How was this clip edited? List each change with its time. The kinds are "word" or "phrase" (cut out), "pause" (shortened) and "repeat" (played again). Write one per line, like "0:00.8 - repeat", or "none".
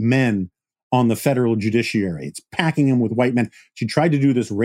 none

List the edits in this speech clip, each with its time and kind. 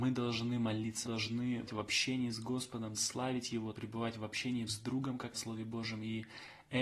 0:01.0 - word
0:01.7 - word
0:03.0 - word
0:03.7 - word
0:04.7 - word
0:05.3 - word

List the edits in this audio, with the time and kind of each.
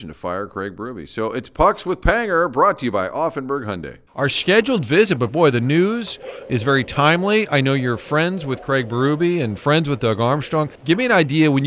0:04.1 - pause
0:10.8 - pause

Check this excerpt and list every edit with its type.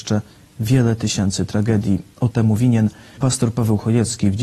0:02.3 - phrase
0:03.2 - word

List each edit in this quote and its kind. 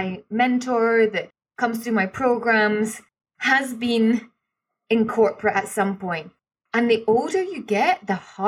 none

